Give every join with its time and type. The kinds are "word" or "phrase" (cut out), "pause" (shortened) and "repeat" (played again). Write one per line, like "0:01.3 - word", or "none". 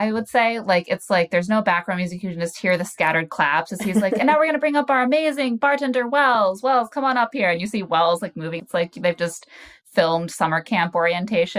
0:08.6 - phrase